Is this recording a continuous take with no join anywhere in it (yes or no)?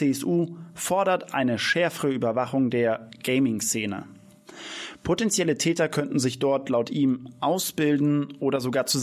yes